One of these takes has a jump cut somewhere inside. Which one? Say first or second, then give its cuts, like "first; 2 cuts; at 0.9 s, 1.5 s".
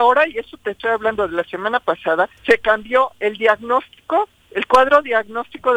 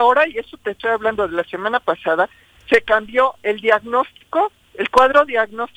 first; 1 cut; at 2.4 s